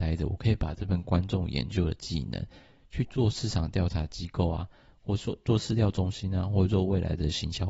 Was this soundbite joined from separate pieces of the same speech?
no; 0 cuts

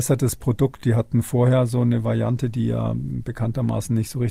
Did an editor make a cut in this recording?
no; 0 cuts

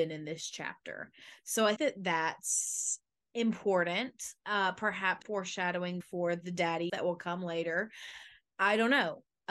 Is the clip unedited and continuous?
no; 4 cuts; at 1.8 s, 5.2 s, 6.0 s, 6.9 s

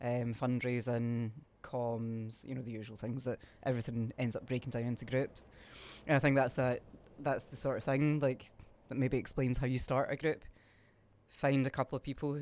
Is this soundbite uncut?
no; 1 cut; at 1.5 s

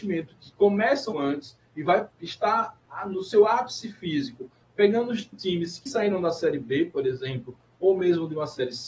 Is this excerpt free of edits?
no; 3 cuts; at 1.1 s, 5.3 s, 5.9 s

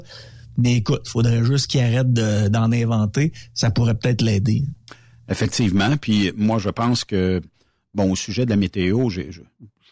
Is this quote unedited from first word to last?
yes; 0 cuts

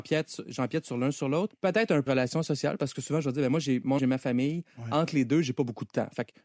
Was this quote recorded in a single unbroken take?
no; 2 cuts; at 2.1 s, 4.0 s

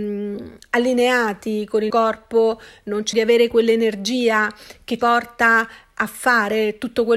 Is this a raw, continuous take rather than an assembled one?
no; 3 cuts; at 1.9 s, 3.1 s, 5.0 s

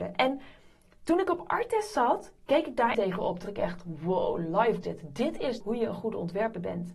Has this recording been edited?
yes; 4 cuts; at 2.9 s, 3.4 s, 4.8 s, 5.6 s

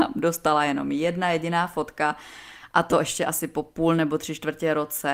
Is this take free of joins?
yes; 0 cuts

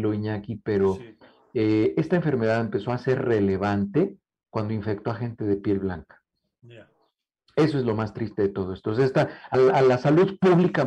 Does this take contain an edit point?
yes; 1 cut; at 9.5 s

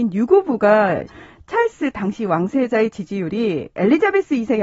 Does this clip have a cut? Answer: yes; 1 cut; at 1.1 s

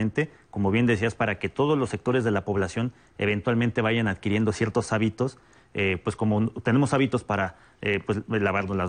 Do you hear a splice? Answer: no; 0 cuts

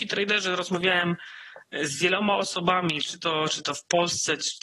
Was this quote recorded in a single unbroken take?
yes; 0 cuts

